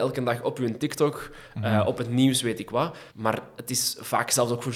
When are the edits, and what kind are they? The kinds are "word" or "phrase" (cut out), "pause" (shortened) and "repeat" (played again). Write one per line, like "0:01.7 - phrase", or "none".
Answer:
0:03.1 - pause